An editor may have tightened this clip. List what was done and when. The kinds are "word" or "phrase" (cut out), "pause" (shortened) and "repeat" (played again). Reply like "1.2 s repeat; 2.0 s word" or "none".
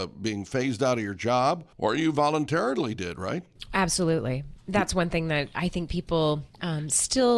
6.5 s pause